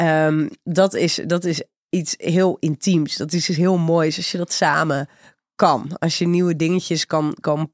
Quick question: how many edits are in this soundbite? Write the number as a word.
zero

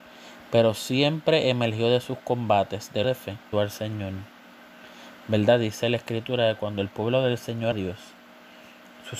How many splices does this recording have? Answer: three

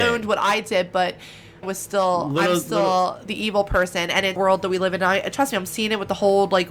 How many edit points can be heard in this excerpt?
two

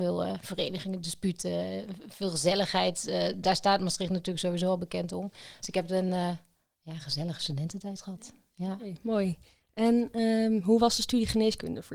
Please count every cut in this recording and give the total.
zero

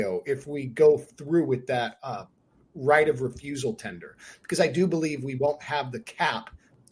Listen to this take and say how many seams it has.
zero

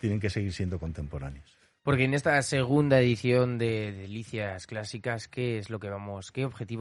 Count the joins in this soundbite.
zero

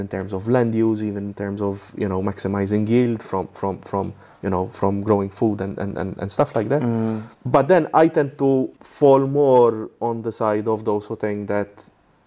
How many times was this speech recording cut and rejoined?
two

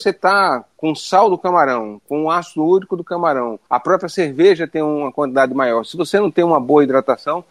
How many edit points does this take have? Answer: one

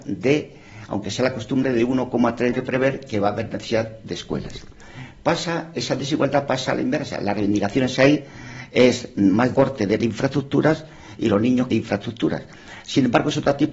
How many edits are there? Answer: four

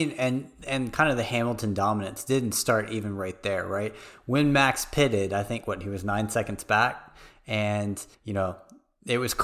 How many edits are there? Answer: one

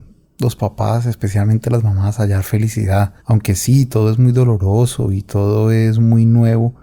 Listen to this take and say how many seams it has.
one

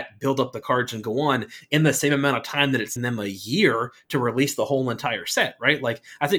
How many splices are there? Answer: one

